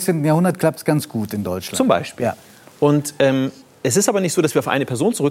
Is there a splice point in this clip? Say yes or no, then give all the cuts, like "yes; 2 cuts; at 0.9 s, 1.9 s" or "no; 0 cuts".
no; 0 cuts